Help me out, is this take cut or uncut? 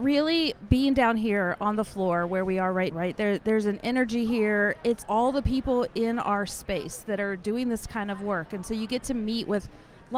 cut